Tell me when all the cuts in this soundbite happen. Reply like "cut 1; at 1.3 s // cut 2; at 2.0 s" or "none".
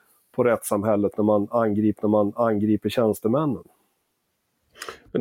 cut 1; at 2.0 s